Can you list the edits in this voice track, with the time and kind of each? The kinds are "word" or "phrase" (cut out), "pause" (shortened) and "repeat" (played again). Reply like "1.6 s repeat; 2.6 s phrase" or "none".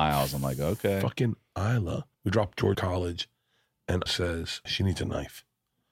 2.1 s pause; 2.7 s phrase; 4.1 s word; 4.7 s word

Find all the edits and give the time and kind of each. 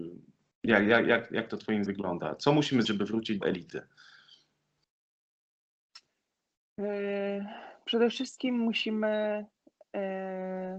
1.9 s word; 2.8 s word; 3.4 s word

